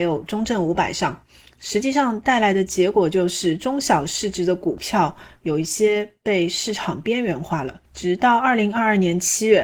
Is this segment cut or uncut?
cut